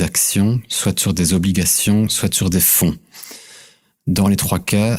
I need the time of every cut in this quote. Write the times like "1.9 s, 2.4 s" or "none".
none